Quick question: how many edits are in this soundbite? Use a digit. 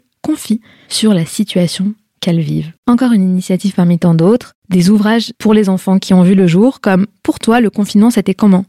2